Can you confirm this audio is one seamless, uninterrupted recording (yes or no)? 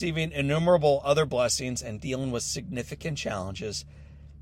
yes